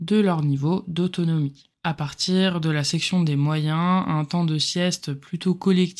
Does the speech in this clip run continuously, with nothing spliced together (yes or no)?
yes